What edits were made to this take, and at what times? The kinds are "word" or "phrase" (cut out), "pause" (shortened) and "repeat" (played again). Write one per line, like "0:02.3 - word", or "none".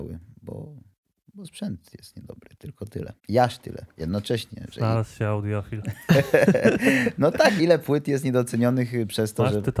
0:03.2 - pause
0:07.6 - phrase